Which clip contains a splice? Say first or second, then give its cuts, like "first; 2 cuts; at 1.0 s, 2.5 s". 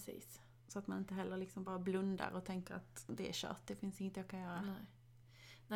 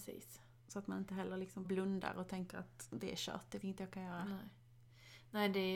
second; 2 cuts; at 1.6 s, 3.6 s